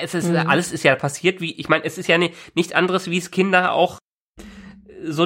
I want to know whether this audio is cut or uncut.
uncut